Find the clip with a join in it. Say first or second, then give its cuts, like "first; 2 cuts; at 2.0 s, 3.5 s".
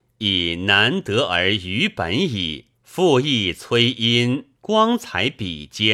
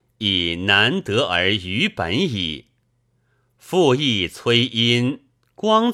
first; 2 cuts; at 2.7 s, 4.6 s